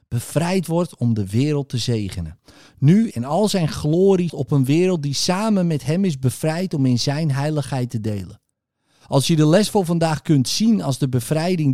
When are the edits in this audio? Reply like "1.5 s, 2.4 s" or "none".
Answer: 3.1 s, 4.3 s